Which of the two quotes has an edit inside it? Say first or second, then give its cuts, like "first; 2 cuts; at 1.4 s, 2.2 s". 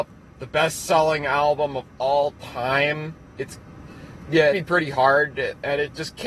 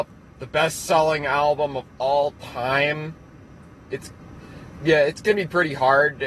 first; 2 cuts; at 3.2 s, 4.5 s